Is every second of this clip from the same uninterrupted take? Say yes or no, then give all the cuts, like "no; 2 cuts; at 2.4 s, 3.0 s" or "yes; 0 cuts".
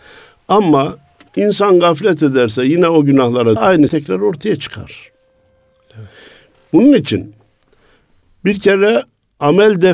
no; 2 cuts; at 3.6 s, 3.9 s